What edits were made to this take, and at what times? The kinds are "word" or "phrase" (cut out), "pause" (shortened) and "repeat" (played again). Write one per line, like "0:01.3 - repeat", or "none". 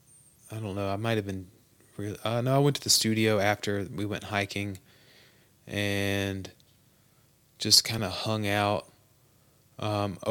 none